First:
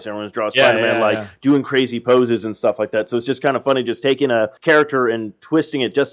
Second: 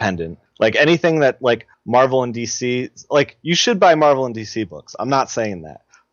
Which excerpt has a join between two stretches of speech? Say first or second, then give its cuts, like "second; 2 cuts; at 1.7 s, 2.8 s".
first; 1 cut; at 4.6 s